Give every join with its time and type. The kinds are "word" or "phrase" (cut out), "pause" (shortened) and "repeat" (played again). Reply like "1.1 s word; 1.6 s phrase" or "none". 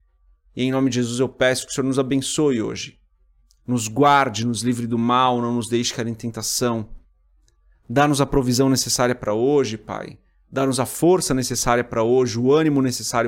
none